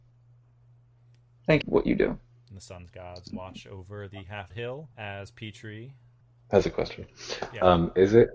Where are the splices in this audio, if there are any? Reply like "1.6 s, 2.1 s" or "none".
1.6 s, 4.5 s, 4.9 s, 6.2 s